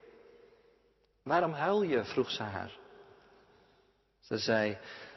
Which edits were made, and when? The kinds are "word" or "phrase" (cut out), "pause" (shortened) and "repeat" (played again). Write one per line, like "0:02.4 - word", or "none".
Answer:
none